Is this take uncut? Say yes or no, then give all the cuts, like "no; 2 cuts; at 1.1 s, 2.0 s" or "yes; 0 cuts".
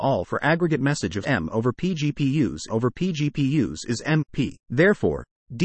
no; 3 cuts; at 1.2 s, 2.7 s, 4.6 s